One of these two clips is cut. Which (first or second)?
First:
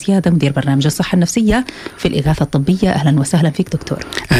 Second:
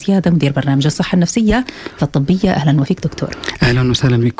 second